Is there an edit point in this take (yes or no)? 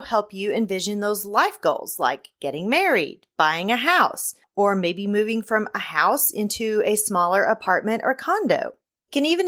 no